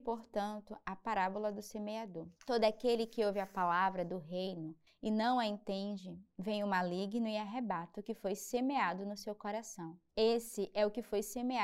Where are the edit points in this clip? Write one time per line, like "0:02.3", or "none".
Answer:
0:02.4
0:04.9
0:10.1